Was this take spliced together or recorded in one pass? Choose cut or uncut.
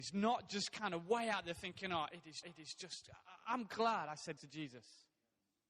cut